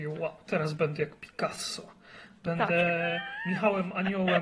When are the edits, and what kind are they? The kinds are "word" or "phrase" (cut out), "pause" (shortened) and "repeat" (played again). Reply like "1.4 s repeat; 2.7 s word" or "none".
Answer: none